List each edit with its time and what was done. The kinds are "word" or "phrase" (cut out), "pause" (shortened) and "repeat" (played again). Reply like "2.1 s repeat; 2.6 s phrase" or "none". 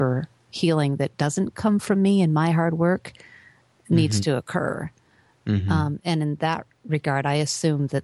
none